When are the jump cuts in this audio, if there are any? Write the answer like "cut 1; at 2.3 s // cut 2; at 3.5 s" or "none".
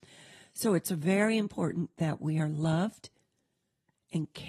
none